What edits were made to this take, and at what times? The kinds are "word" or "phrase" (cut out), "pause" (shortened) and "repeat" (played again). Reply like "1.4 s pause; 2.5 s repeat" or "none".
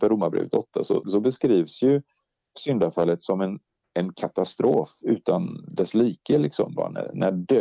1.0 s word; 4.1 s word